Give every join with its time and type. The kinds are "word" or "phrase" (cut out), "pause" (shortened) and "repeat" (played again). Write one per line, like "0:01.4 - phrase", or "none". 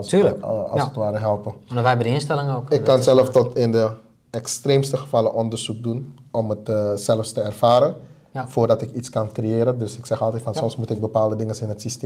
none

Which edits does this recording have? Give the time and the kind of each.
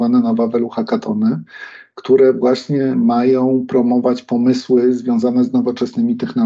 none

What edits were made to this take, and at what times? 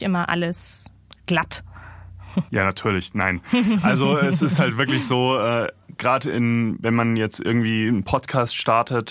0:02.5 - pause

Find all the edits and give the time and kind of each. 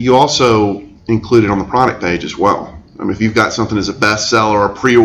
0:01.0 - pause

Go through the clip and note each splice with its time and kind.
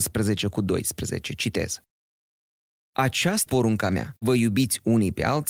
0:03.5 - word
0:04.2 - word

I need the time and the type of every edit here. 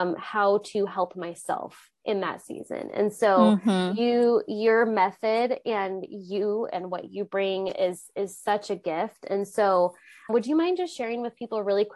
0:10.3 - word

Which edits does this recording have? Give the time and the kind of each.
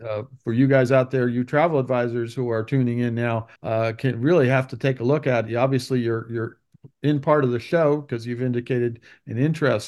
0:03.6 - pause

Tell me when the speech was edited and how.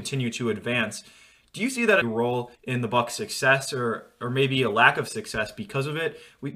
0:02.0 - phrase
0:02.5 - pause

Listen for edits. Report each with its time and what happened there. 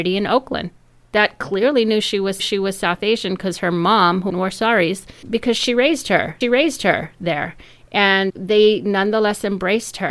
0:02.4 - repeat
0:04.3 - word
0:05.2 - word
0:06.4 - repeat
0:08.3 - word

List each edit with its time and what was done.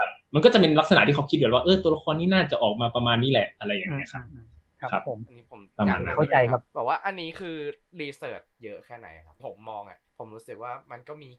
0:06.7 - pause
0:09.4 - phrase
0:10.1 - pause

